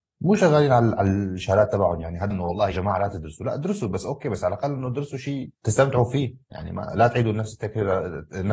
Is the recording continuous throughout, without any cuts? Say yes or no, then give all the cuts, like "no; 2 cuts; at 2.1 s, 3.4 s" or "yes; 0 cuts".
no; 3 cuts; at 2.3 s, 2.7 s, 5.5 s